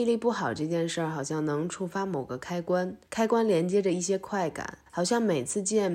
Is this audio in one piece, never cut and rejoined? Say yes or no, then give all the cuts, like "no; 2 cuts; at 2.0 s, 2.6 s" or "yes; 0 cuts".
no; 2 cuts; at 3.0 s, 4.9 s